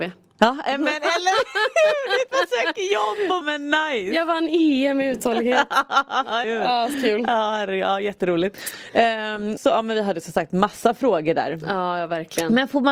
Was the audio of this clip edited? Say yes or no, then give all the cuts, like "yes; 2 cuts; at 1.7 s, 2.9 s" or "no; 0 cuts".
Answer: yes; 4 cuts; at 3.4 s, 6.4 s, 6.9 s, 9.6 s